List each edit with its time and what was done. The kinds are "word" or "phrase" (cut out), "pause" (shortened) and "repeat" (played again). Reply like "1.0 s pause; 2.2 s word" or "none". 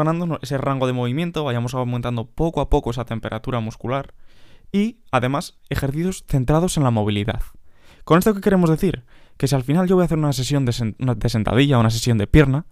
none